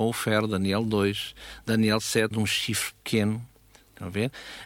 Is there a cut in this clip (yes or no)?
yes